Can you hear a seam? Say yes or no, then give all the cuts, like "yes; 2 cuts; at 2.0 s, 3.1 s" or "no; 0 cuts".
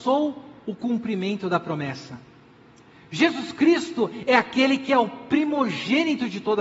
no; 0 cuts